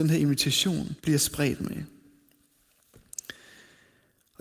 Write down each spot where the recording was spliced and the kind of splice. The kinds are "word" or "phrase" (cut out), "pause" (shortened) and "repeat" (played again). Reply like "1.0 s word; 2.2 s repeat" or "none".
1.0 s pause